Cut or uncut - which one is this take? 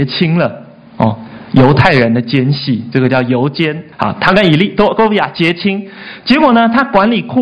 cut